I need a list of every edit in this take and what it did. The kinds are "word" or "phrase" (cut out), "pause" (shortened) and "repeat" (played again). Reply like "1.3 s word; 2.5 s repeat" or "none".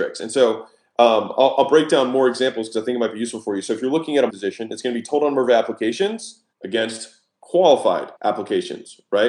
4.3 s word; 6.5 s pause; 8.2 s pause